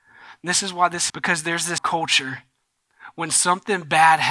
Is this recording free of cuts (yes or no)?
no